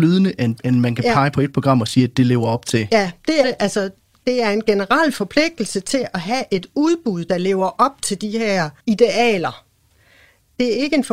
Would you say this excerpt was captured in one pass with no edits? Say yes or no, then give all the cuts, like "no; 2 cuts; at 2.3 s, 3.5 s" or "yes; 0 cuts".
no; 2 cuts; at 3.4 s, 8.8 s